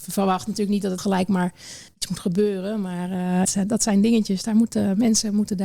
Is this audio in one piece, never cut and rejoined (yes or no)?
no